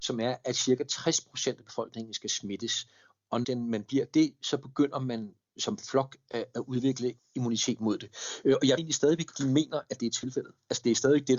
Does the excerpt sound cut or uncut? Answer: cut